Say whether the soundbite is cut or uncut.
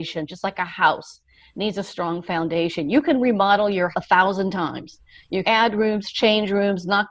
cut